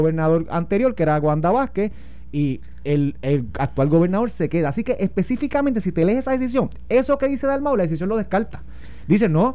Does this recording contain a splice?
no; 0 cuts

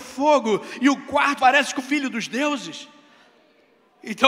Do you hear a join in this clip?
yes; 2 cuts; at 1.4 s, 1.8 s

